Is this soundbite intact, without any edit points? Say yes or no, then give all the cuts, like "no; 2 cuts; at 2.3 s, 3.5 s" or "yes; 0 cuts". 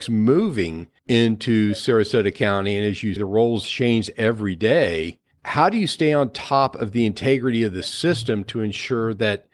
no; 3 cuts; at 1.0 s, 3.2 s, 5.3 s